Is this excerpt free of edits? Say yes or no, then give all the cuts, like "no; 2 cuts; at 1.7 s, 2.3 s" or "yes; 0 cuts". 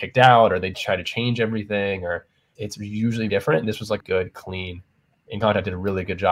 no; 4 cuts; at 2.6 s, 3.3 s, 4.0 s, 5.4 s